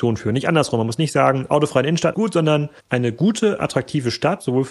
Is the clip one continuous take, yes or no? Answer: no